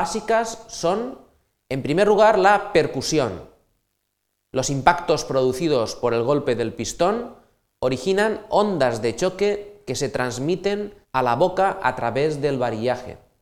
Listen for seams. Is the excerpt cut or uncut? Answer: cut